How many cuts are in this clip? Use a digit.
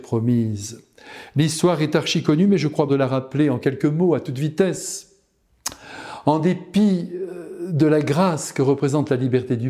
1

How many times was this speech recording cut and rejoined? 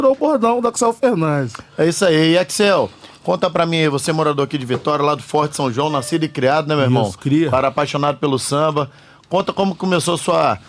0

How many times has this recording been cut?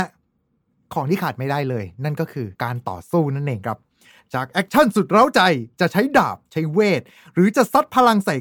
1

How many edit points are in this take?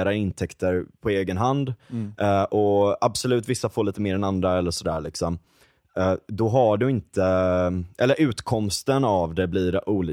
0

